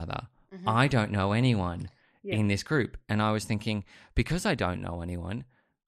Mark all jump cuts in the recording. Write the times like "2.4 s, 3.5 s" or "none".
none